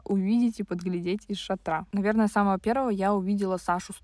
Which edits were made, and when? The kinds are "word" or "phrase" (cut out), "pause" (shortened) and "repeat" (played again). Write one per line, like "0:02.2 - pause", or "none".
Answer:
none